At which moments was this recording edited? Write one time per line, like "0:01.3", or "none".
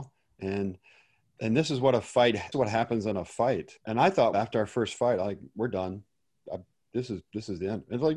0:02.5
0:03.8
0:04.3